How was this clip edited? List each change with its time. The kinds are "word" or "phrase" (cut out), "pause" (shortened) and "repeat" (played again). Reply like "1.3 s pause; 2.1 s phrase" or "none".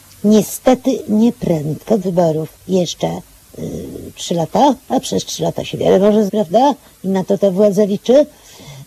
2.0 s phrase; 2.6 s pause; 4.8 s pause; 6.3 s word